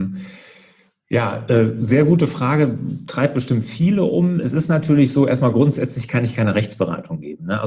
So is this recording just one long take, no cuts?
yes; 0 cuts

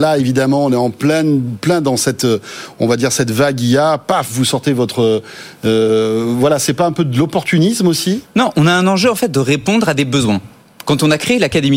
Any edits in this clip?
no; 0 cuts

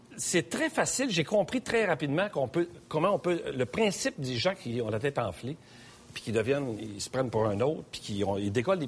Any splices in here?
no; 0 cuts

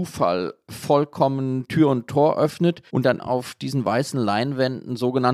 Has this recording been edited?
yes; 2 cuts; at 2.9 s, 3.2 s

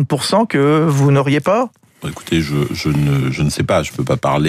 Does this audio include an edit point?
no; 0 cuts

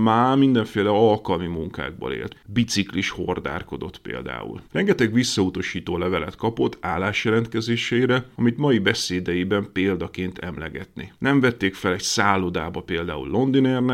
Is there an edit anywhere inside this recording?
yes; 4 cuts; at 2.3 s, 4.6 s, 10.3 s, 11.1 s

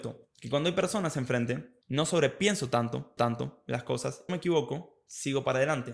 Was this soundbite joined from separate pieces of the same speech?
yes; 3 cuts; at 1.8 s, 3.2 s, 4.3 s

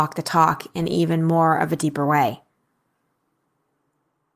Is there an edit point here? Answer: no; 0 cuts

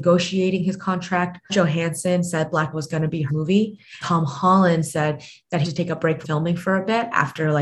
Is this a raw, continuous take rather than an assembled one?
no; 6 cuts; at 1.5 s, 2.7 s, 3.3 s, 4.0 s, 5.6 s, 6.2 s

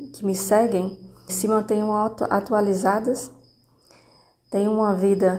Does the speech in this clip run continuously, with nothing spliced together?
no; 1 cut; at 1.3 s

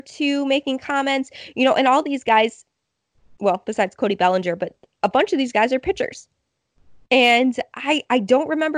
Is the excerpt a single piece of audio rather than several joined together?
yes; 0 cuts

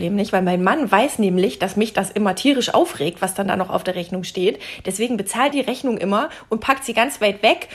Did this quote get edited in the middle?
yes; 1 cut; at 5.5 s

